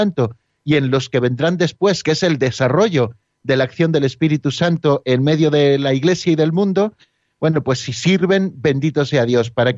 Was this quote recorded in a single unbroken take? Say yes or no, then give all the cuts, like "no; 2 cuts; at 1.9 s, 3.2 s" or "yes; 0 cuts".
yes; 0 cuts